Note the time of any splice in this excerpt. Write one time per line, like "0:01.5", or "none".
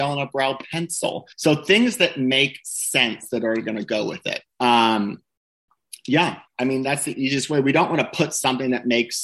0:01.3
0:04.5
0:06.5